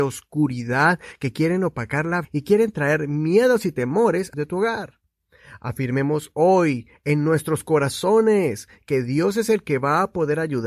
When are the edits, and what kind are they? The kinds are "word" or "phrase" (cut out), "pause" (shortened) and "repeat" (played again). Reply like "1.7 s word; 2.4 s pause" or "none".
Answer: 2.2 s word; 4.3 s phrase